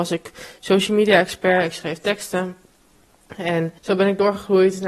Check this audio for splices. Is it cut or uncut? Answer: cut